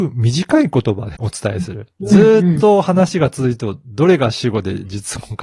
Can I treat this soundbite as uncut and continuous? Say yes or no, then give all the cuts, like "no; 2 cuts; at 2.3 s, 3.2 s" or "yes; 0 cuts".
no; 2 cuts; at 1.1 s, 1.9 s